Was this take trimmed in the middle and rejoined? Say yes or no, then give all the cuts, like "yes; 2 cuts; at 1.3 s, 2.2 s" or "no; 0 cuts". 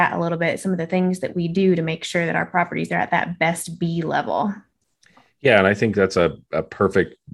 no; 0 cuts